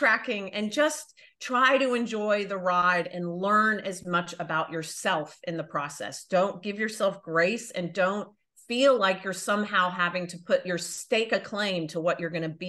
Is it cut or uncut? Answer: uncut